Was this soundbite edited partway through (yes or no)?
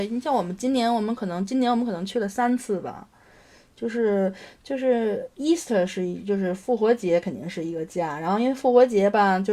no